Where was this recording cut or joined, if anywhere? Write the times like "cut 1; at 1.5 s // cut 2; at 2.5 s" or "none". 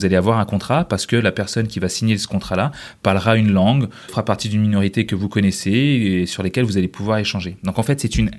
cut 1; at 4.1 s